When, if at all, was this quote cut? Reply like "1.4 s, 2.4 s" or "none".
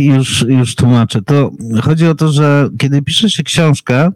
none